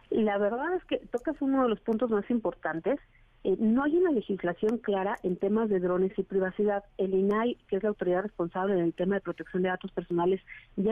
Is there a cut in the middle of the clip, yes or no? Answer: no